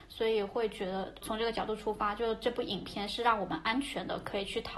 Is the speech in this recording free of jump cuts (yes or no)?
no